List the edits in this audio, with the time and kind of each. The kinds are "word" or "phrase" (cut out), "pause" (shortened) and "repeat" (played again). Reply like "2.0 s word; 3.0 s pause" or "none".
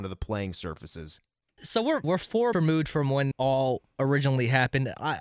1.6 s word; 2.0 s word; 2.5 s word; 3.3 s word